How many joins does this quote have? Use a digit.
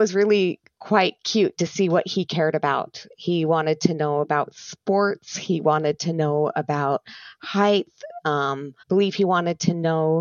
1